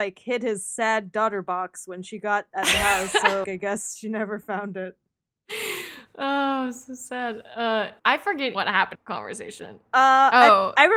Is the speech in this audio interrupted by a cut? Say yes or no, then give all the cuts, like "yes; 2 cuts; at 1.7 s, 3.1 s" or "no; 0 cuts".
yes; 4 cuts; at 3.4 s, 8.0 s, 8.5 s, 8.9 s